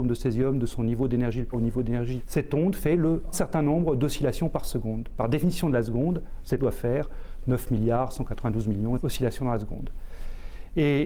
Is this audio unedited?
no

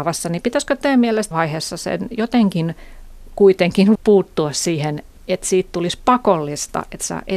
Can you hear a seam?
yes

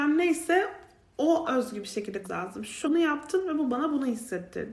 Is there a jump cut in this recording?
yes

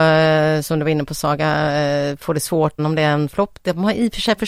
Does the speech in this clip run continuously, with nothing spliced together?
no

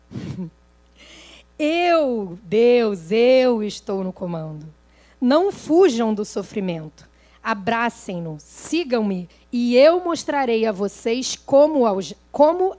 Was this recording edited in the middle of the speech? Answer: no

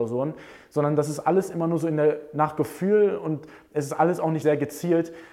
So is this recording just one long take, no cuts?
no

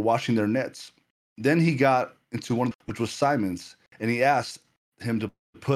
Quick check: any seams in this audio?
yes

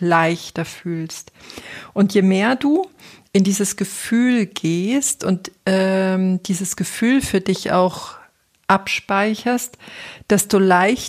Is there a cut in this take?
no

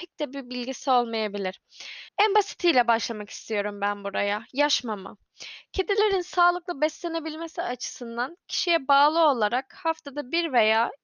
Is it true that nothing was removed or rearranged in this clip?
no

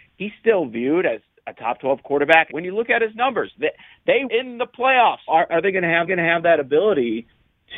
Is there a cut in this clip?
yes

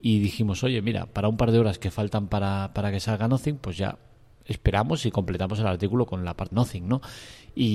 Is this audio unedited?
no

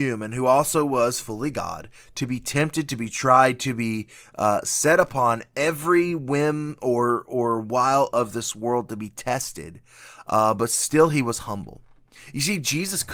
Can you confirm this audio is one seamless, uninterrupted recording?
yes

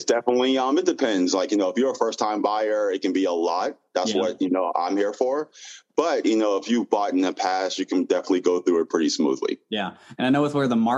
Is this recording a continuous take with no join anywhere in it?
no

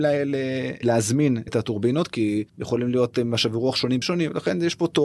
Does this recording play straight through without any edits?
no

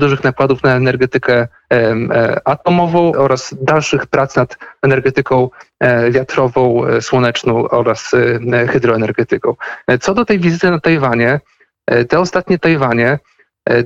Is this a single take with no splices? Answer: no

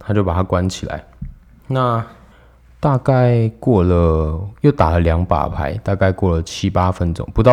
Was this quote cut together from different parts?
yes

